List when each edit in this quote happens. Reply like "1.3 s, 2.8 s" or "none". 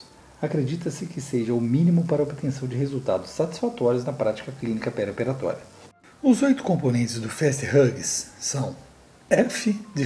none